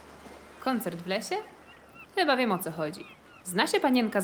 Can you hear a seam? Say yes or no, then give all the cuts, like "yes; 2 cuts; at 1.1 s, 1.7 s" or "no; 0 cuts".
no; 0 cuts